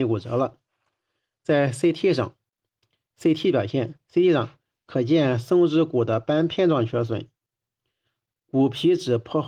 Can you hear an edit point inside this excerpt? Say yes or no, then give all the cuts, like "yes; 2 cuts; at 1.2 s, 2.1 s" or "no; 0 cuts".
no; 0 cuts